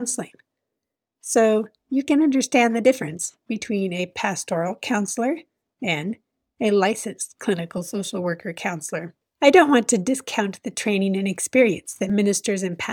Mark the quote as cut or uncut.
uncut